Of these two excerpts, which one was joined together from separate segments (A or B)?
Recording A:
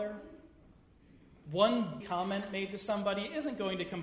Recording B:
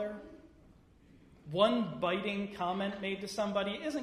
A